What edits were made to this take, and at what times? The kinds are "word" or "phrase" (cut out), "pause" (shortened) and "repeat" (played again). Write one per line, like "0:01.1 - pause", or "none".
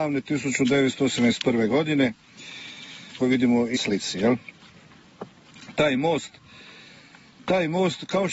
0:03.2 - phrase
0:03.7 - word